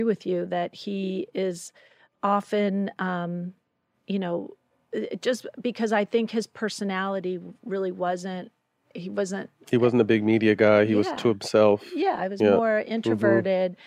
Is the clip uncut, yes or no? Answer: yes